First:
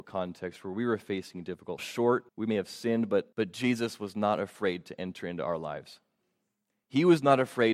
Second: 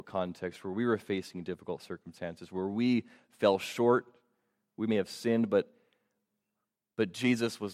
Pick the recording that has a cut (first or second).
first